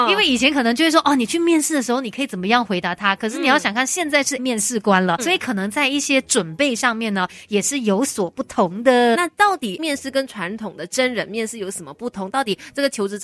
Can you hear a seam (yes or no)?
yes